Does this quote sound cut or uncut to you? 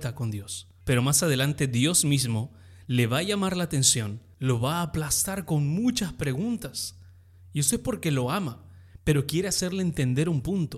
uncut